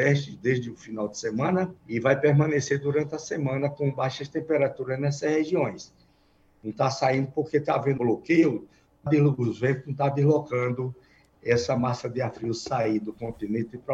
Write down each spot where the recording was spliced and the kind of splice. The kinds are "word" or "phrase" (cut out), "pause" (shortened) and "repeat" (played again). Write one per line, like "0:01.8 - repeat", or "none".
0:01.8 - pause
0:08.0 - word
0:09.1 - word